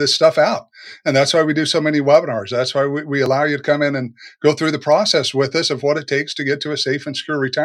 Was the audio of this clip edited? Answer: no; 0 cuts

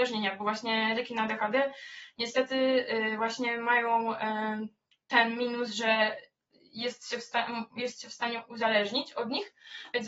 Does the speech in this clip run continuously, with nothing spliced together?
yes; 0 cuts

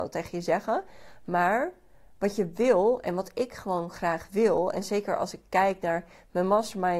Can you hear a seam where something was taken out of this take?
no; 0 cuts

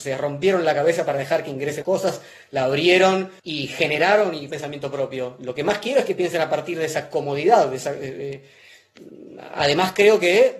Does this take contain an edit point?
yes; 3 cuts; at 1.8 s, 3.4 s, 4.5 s

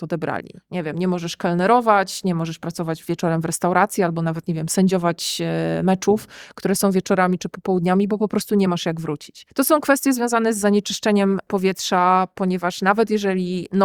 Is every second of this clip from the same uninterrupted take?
yes; 0 cuts

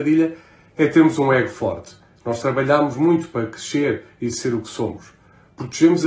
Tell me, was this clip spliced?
no; 0 cuts

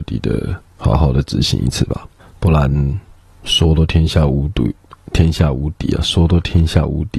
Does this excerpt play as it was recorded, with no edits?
no; 2 cuts; at 2.2 s, 3.3 s

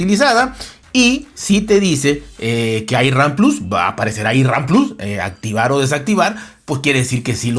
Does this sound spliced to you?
no; 0 cuts

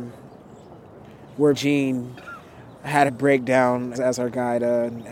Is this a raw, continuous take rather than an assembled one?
no; 3 cuts; at 1.5 s, 3.1 s, 3.9 s

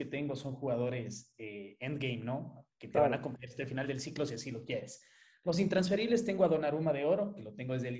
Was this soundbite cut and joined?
no; 0 cuts

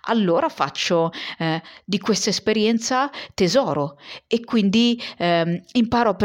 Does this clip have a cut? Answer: no; 0 cuts

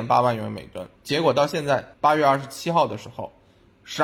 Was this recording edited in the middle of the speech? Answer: yes; 2 cuts; at 0.9 s, 1.9 s

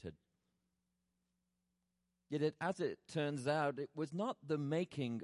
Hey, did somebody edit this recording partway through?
no; 0 cuts

